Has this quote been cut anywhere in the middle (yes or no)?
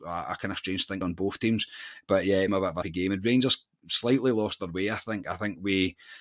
yes